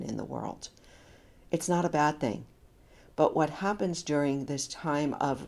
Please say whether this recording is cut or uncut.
uncut